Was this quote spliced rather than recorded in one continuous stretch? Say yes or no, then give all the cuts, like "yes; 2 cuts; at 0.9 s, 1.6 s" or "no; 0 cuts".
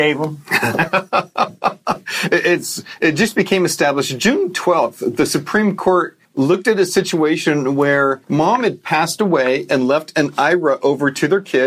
yes; 2 cuts; at 6.2 s, 8.2 s